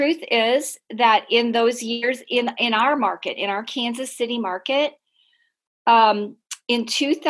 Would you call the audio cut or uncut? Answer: uncut